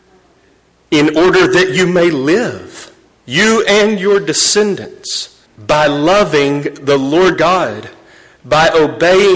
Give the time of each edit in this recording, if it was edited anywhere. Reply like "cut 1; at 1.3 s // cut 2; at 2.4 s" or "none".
cut 1; at 3.1 s // cut 2; at 5.5 s // cut 3; at 7.3 s